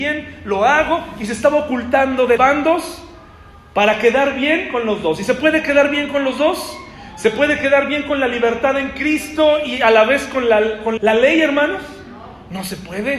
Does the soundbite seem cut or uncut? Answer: cut